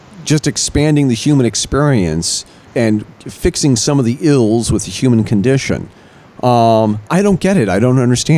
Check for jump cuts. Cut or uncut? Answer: cut